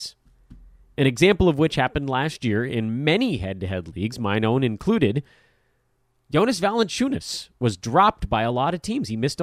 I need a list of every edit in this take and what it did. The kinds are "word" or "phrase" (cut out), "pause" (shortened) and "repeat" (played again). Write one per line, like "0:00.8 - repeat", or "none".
none